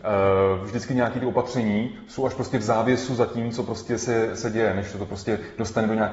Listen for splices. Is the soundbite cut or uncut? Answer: cut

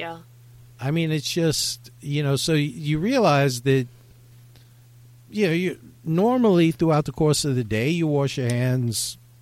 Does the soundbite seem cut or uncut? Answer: uncut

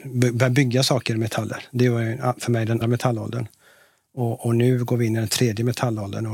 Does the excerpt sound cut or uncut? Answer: cut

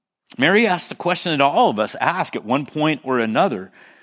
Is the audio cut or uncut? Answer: uncut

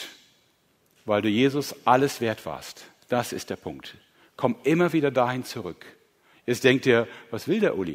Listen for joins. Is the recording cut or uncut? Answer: uncut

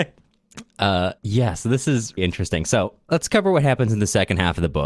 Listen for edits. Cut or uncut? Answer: cut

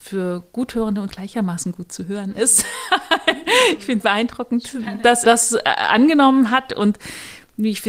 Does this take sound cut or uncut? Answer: cut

